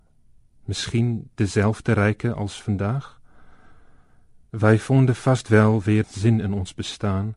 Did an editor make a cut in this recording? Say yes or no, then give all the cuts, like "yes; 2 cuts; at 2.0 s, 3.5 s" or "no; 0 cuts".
yes; 1 cut; at 6.0 s